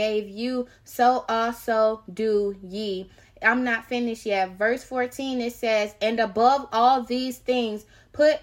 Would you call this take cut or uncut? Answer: uncut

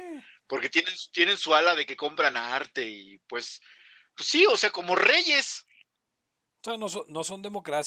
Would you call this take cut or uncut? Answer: uncut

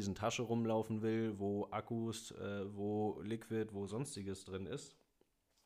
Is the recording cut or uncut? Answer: uncut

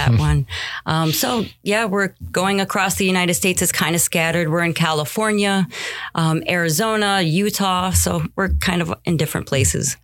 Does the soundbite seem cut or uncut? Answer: uncut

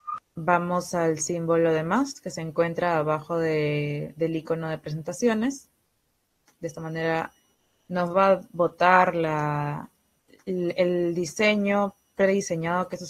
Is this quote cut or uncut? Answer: uncut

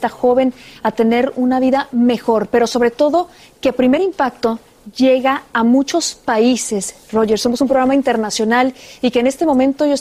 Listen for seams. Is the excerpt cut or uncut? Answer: uncut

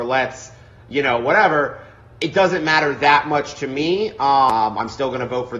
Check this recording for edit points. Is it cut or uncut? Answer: uncut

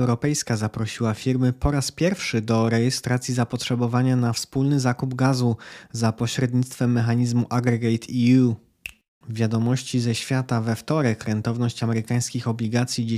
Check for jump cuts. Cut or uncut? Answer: uncut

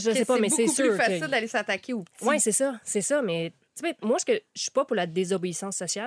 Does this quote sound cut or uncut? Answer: uncut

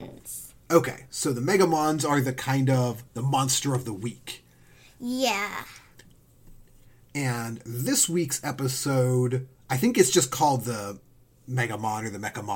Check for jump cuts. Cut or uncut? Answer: uncut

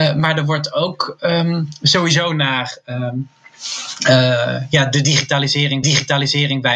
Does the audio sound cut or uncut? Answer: cut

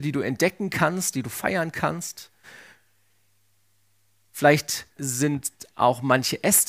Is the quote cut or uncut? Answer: cut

